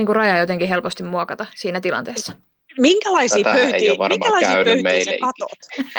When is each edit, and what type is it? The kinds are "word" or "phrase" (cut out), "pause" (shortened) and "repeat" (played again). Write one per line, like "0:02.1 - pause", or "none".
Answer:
none